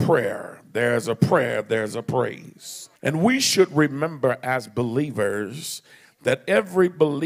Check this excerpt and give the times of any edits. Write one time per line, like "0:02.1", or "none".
0:03.0